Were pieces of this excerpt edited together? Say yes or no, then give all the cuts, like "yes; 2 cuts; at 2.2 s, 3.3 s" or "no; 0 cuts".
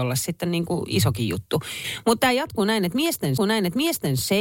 yes; 1 cut; at 3.4 s